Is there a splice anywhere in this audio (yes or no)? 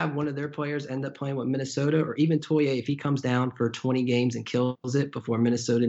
no